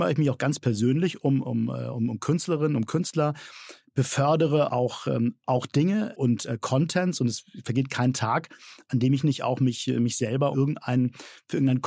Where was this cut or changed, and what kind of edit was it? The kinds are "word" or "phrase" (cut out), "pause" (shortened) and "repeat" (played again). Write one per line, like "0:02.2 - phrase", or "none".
0:01.4 - word
0:10.5 - word